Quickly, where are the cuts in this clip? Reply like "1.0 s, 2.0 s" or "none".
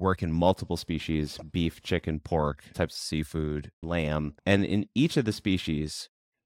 2.7 s, 3.8 s, 4.4 s